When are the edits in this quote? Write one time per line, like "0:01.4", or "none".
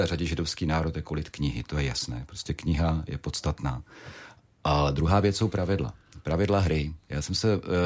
none